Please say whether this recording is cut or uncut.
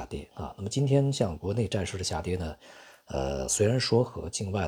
uncut